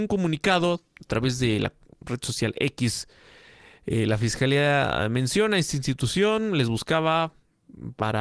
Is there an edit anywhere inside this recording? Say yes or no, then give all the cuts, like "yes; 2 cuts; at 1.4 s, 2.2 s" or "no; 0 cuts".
no; 0 cuts